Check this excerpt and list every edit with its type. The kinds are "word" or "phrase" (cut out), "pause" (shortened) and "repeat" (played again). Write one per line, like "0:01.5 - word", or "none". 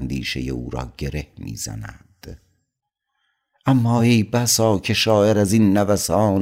none